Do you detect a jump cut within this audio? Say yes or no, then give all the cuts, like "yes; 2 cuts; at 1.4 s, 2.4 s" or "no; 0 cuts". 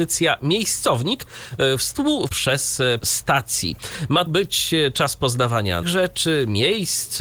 yes; 4 cuts; at 2.3 s, 3.0 s, 4.3 s, 5.8 s